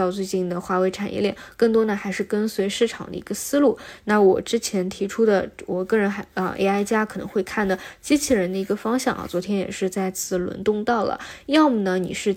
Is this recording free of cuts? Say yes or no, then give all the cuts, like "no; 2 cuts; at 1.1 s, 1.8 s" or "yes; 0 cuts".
yes; 0 cuts